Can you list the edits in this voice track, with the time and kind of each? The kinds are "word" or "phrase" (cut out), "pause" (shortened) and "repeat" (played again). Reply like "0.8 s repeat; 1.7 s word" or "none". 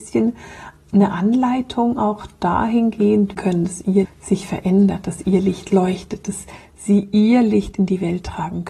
3.4 s phrase; 4.0 s word